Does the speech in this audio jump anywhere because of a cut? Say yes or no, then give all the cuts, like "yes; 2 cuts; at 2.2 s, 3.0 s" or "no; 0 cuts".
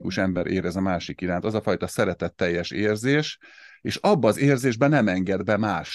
no; 0 cuts